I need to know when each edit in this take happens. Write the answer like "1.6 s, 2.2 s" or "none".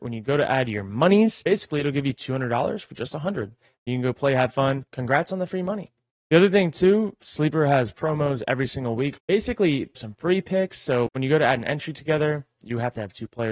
9.2 s, 9.9 s

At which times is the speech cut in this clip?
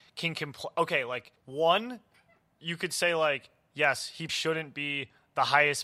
1.4 s, 4.3 s

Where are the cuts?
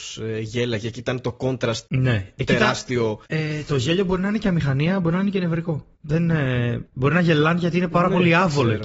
1.9 s, 3.3 s, 5.9 s, 6.9 s

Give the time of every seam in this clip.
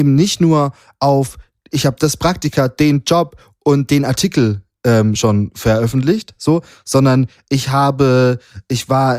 none

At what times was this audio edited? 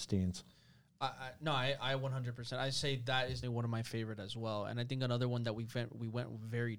3.4 s

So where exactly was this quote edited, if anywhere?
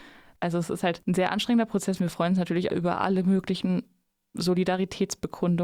2.7 s

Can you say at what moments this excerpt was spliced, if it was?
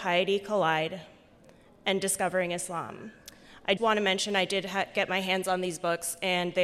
3.8 s

